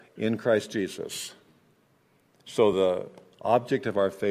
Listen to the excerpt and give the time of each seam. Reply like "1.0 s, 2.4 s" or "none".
none